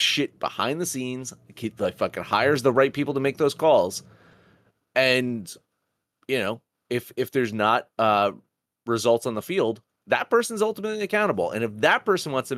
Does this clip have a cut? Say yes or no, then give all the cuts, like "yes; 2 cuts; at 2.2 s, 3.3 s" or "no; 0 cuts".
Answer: no; 0 cuts